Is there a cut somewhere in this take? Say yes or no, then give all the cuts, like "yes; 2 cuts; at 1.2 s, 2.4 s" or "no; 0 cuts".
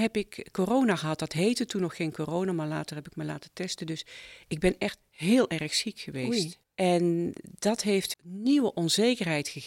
yes; 2 cuts; at 6.6 s, 8.1 s